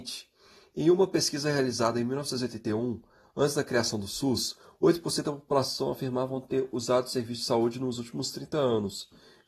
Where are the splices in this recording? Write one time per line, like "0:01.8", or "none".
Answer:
none

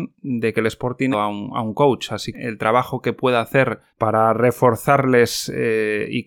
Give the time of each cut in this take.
0:01.1
0:02.3
0:03.9

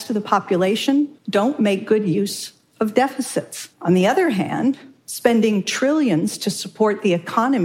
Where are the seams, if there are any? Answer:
0:01.2
0:03.7

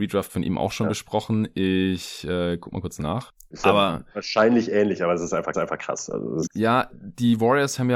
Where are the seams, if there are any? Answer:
0:05.5
0:06.5
0:06.9

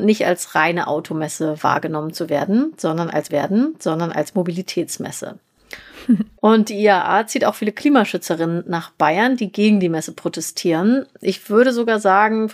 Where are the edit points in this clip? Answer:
0:03.3
0:06.4

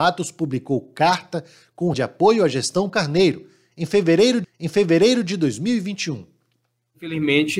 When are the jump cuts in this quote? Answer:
0:01.9
0:02.9
0:04.4

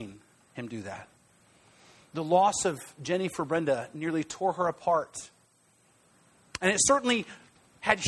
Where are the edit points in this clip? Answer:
none

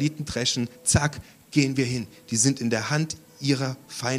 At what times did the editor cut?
none

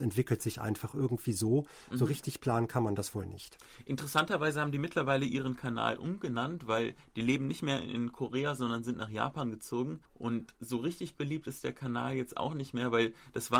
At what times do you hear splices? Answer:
0:10.0

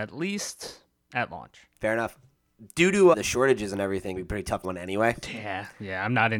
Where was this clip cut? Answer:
0:01.7
0:03.1
0:04.2
0:04.6

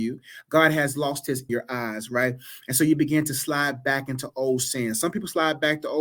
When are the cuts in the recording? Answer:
0:01.5

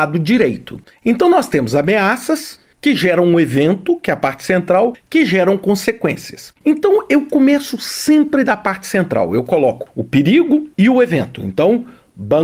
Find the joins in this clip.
0:06.6
0:10.7

